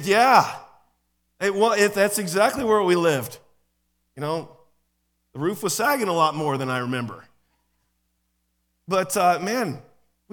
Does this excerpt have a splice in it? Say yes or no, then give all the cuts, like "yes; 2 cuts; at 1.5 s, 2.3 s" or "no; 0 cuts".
no; 0 cuts